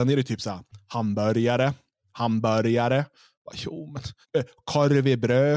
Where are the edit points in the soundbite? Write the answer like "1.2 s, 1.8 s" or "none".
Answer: 4.2 s